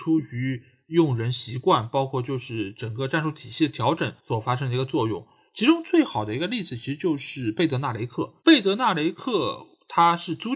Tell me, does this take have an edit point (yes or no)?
yes